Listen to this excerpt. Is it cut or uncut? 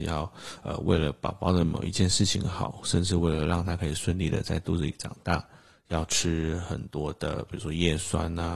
uncut